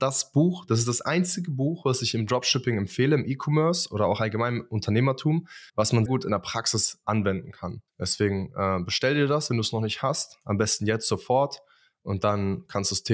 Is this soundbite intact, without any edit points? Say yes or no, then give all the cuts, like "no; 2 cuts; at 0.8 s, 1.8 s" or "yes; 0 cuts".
no; 3 cuts; at 5.7 s, 6.1 s, 7.9 s